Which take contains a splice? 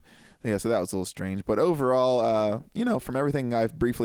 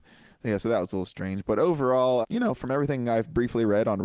second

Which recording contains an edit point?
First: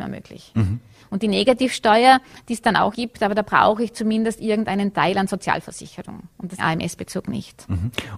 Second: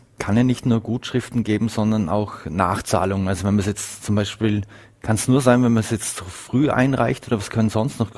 first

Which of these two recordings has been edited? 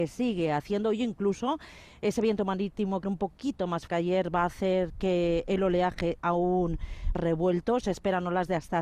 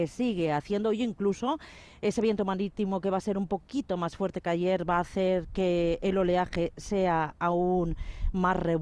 first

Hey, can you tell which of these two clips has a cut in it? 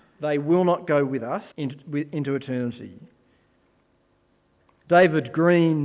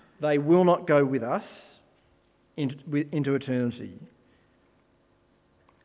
first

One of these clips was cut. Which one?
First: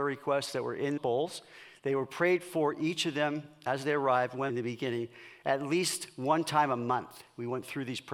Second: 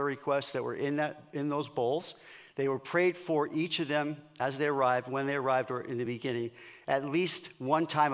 first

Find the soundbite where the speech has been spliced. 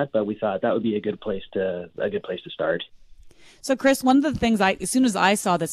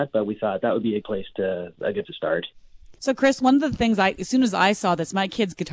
second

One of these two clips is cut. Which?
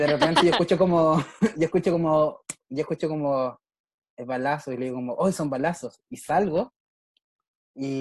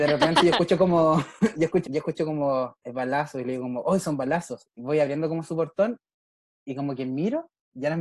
second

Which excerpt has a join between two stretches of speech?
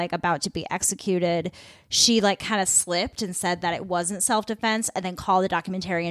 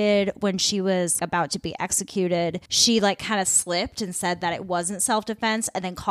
second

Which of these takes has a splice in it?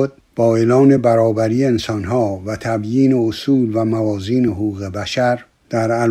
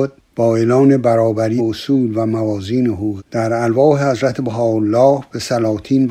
second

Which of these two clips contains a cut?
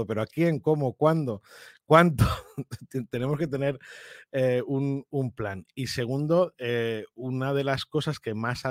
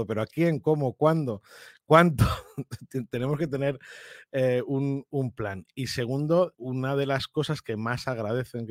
second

